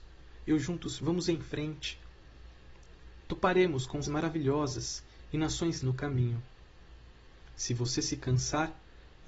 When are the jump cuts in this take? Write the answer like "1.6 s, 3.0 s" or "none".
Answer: 1.0 s, 4.0 s, 5.8 s